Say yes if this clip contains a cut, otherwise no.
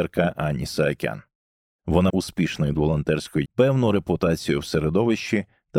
yes